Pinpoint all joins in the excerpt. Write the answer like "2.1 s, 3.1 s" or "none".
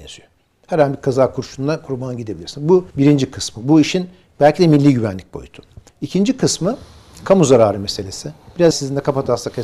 2.9 s, 5.9 s, 8.7 s